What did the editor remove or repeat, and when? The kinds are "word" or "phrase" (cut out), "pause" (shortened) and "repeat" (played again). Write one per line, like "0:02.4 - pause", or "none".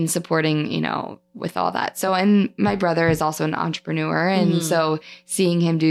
none